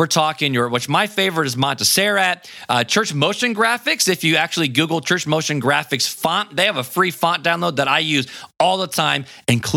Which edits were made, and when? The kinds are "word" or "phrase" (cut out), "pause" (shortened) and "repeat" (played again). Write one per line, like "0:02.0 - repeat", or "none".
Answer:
none